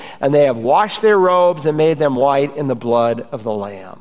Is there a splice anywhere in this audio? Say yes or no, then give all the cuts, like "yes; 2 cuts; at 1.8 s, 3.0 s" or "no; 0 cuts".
no; 0 cuts